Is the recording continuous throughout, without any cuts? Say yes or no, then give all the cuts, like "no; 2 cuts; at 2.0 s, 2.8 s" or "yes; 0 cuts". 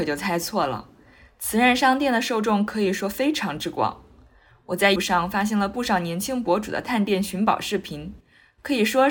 no; 1 cut; at 5.0 s